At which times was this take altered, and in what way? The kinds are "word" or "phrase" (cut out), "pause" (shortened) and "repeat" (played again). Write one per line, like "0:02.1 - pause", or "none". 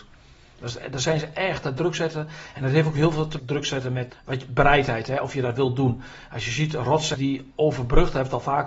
0:03.4 - phrase
0:04.1 - word
0:07.1 - phrase